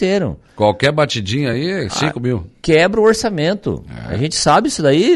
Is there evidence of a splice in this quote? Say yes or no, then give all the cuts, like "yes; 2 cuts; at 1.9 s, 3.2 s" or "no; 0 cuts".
no; 0 cuts